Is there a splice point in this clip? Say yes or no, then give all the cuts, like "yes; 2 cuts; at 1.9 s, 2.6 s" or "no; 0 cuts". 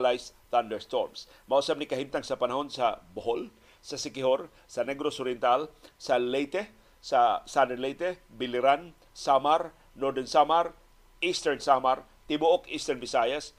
no; 0 cuts